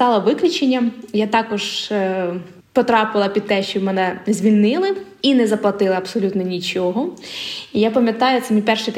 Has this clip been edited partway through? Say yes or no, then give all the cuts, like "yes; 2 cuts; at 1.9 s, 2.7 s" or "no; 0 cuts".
yes; 1 cut; at 2.6 s